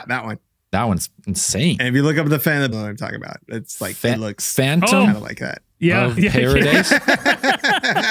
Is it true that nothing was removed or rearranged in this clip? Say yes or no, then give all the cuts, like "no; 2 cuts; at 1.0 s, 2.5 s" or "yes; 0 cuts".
no; 4 cuts; at 1.2 s, 2.7 s, 5.7 s, 6.2 s